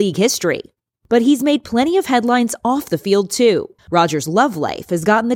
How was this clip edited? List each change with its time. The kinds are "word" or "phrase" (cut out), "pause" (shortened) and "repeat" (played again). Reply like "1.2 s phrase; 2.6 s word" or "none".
3.8 s pause